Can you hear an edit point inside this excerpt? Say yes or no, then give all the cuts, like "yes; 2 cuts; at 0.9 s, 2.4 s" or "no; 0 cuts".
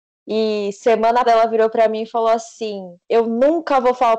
yes; 2 cuts; at 1.3 s, 3.0 s